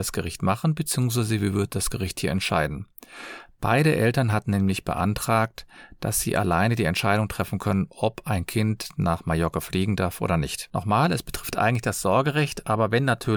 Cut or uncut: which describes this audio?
uncut